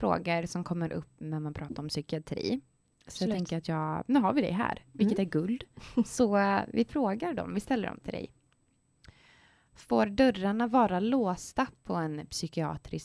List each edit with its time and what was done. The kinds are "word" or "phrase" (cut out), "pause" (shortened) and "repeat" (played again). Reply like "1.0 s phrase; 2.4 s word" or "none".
none